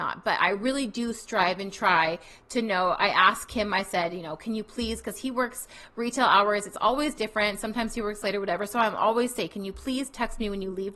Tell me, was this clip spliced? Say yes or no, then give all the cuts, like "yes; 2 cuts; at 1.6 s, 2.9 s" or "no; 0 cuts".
no; 0 cuts